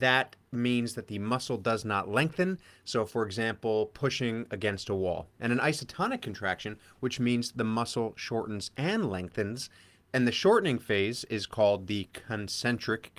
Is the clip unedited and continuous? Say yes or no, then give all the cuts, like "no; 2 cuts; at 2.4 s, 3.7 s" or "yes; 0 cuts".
yes; 0 cuts